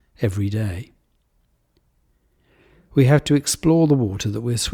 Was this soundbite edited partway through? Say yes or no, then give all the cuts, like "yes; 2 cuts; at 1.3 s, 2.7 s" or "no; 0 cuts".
no; 0 cuts